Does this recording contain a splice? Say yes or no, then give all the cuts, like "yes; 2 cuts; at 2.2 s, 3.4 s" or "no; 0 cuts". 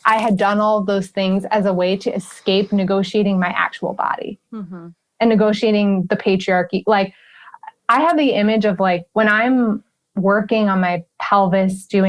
no; 0 cuts